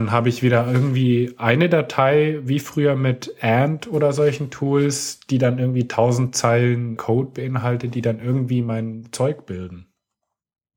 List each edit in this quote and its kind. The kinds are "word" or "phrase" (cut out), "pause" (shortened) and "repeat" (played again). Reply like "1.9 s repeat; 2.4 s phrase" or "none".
7.0 s word